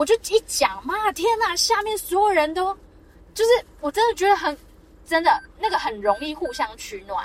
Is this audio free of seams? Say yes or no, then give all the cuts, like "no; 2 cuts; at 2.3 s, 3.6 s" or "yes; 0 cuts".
no; 1 cut; at 3.0 s